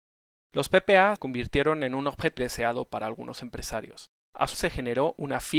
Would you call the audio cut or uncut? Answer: cut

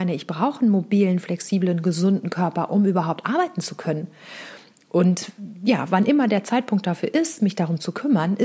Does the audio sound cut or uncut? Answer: uncut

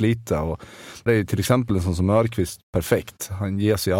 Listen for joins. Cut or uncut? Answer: cut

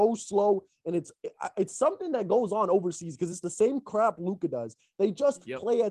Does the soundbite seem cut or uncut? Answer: uncut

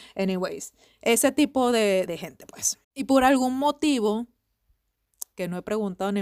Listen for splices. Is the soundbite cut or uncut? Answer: cut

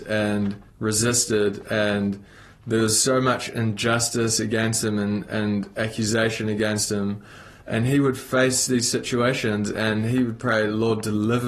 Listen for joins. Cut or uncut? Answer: uncut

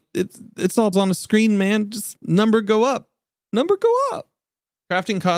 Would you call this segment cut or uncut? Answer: cut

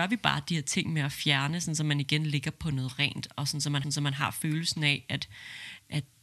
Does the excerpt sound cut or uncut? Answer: cut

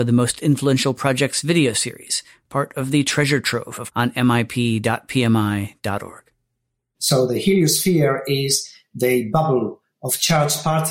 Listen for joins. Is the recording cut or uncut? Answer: cut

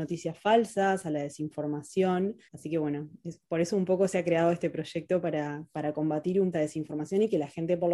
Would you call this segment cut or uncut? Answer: cut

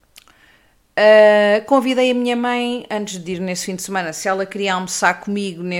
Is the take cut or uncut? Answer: uncut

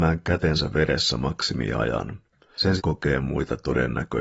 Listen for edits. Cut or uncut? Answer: cut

